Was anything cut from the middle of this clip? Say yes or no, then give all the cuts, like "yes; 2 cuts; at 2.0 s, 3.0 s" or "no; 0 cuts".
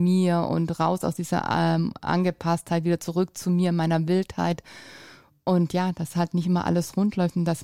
no; 0 cuts